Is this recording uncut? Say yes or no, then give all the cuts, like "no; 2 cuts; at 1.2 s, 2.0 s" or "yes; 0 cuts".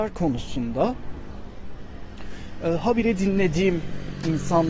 yes; 0 cuts